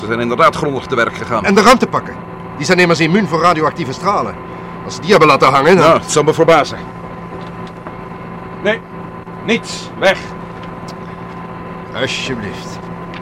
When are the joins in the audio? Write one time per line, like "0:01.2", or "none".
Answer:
none